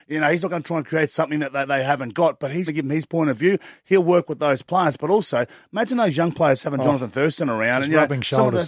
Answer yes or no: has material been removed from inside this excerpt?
yes